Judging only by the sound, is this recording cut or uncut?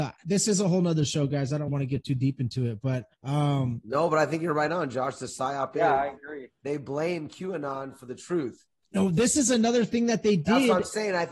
cut